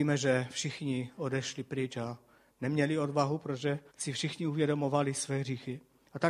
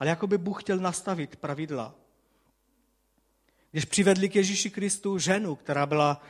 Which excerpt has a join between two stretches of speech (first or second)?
first